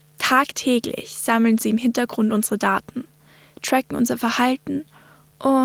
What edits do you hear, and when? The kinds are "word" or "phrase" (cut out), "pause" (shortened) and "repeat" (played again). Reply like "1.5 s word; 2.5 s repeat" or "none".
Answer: none